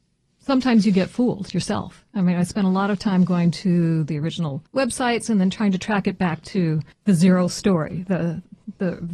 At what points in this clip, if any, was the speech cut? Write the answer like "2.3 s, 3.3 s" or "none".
4.7 s, 6.9 s